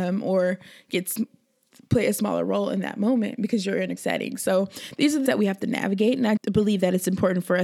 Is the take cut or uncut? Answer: cut